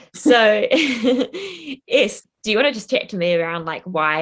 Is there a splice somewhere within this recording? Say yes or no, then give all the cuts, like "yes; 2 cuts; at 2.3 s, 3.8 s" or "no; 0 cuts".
no; 0 cuts